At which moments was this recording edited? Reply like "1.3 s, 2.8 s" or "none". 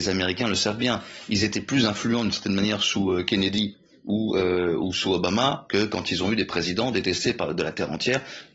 none